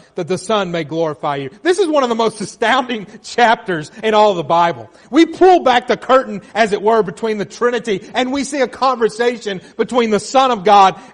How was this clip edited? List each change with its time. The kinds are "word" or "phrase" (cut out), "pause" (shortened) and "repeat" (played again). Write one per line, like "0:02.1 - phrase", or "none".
none